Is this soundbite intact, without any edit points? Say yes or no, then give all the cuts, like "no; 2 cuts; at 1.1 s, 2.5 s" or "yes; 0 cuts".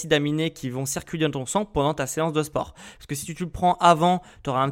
yes; 0 cuts